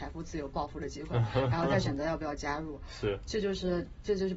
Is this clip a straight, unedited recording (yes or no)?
yes